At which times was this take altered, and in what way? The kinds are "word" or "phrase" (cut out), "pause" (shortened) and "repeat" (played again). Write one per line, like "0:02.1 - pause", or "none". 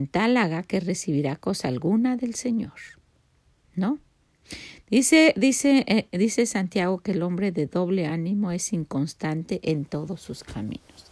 none